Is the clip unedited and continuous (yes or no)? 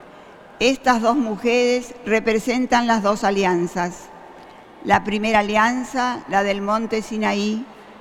yes